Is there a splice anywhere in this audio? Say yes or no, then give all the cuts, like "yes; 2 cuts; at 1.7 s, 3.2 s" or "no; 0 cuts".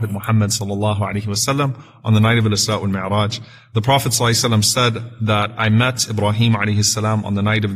no; 0 cuts